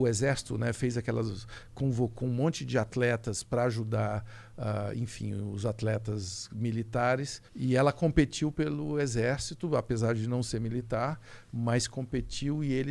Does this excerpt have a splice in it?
yes; 1 cut; at 7.5 s

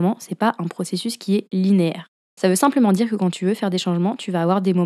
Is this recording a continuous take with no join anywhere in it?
yes; 0 cuts

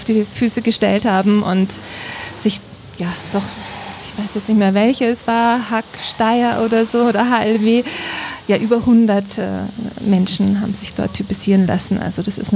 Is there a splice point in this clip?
no; 0 cuts

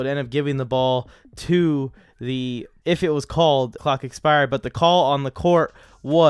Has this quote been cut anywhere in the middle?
yes; 2 cuts; at 2.8 s, 3.8 s

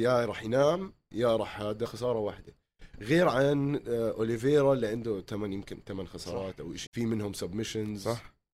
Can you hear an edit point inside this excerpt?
yes; 2 cuts; at 1.9 s, 6.9 s

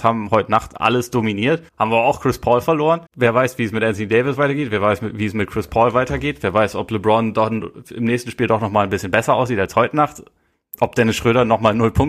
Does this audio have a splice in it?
yes; 2 cuts; at 1.7 s, 3.1 s

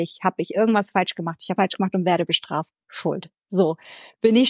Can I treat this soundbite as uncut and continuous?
no; 1 cut; at 1.6 s

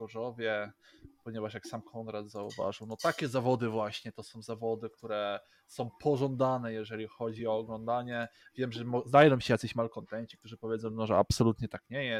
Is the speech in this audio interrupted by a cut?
no; 0 cuts

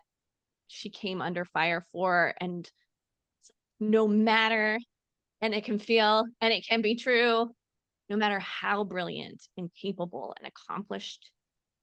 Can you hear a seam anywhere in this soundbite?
no; 0 cuts

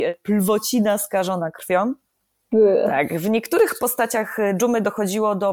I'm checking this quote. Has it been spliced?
no; 0 cuts

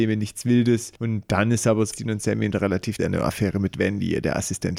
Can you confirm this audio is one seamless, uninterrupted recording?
no; 3 cuts; at 1.0 s, 1.9 s, 3.0 s

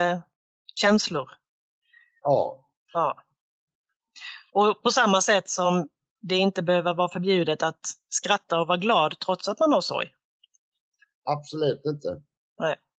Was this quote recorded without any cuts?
yes; 0 cuts

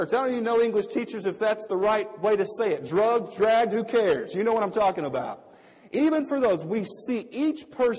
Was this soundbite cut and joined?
no; 0 cuts

